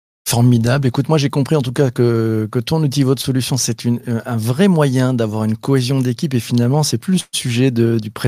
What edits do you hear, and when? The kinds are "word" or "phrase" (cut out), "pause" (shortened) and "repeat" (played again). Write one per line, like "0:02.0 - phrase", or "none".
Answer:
none